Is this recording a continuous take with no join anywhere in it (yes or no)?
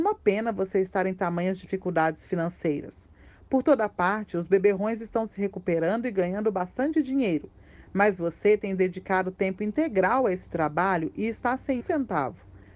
no